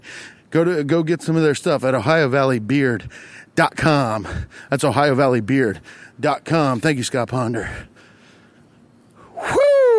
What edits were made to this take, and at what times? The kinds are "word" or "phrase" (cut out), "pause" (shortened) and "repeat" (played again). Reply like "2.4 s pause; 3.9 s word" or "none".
none